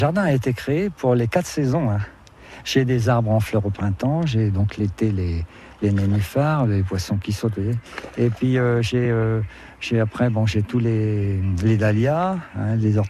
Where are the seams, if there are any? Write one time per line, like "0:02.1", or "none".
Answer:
none